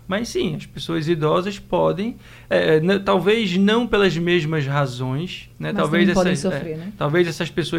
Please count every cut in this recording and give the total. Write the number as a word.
one